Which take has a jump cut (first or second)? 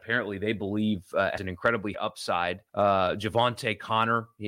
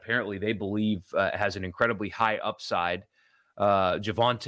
first